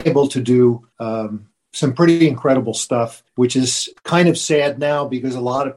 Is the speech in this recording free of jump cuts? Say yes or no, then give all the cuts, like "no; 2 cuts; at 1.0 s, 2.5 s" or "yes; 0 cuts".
no; 3 cuts; at 0.9 s, 3.3 s, 4.0 s